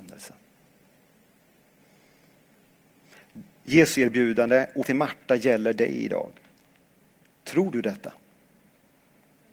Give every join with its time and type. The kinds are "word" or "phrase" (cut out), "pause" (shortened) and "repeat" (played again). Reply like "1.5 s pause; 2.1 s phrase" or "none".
3.9 s word; 4.8 s word

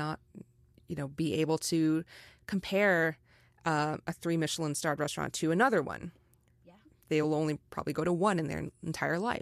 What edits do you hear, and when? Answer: none

